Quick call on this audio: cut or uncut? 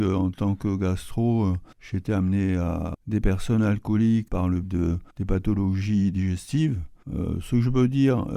cut